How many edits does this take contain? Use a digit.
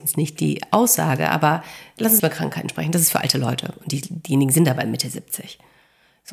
1